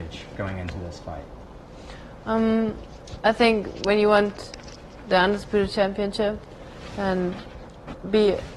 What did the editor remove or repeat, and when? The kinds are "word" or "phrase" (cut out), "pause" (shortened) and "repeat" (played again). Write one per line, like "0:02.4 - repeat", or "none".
none